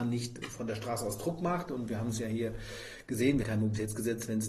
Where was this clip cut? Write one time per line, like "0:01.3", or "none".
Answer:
0:03.4